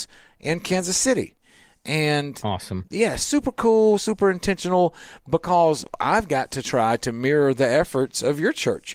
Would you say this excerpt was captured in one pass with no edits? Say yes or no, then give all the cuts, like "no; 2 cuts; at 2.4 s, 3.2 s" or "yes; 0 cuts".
yes; 0 cuts